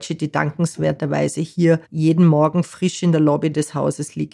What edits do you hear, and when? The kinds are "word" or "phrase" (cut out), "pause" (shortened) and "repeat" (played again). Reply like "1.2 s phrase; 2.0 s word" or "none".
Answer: 1.8 s pause